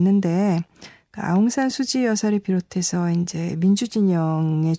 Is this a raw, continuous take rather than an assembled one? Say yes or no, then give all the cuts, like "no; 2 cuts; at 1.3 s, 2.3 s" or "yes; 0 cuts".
yes; 0 cuts